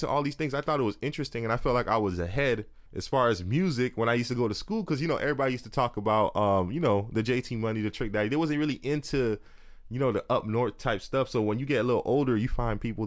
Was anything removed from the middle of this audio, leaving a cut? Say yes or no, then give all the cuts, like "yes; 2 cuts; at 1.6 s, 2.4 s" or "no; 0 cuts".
yes; 1 cut; at 2.9 s